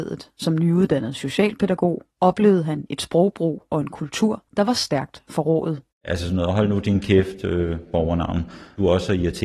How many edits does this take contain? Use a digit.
2